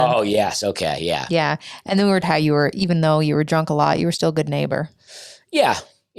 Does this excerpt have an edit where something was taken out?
yes; 1 cut; at 2.2 s

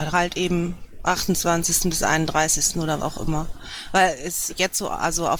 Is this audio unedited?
no; 3 cuts; at 1.0 s, 3.0 s, 4.5 s

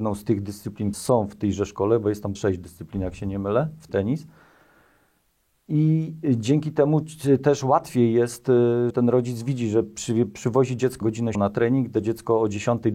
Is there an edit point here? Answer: yes; 6 cuts; at 0.9 s, 2.3 s, 3.9 s, 8.9 s, 11.0 s, 11.3 s

